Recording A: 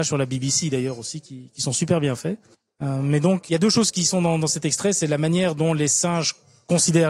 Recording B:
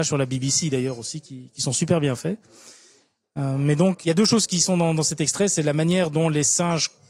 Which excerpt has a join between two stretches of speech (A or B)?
A